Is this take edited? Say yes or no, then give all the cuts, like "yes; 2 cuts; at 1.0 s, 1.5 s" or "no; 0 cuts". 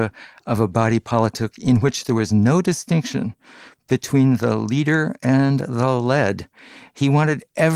no; 0 cuts